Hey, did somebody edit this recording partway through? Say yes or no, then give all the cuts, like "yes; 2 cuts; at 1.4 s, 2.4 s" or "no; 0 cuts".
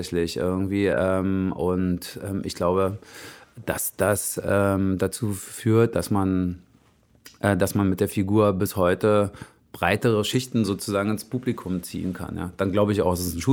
no; 0 cuts